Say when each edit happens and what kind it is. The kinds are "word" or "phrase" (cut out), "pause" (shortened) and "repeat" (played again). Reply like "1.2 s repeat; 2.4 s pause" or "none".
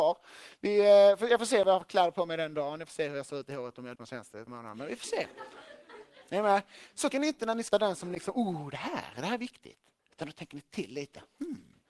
3.9 s word; 4.5 s word; 7.1 s word; 7.7 s word; 10.0 s pause